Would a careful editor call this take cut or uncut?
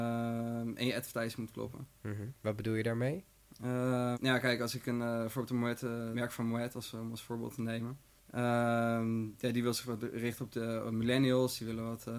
cut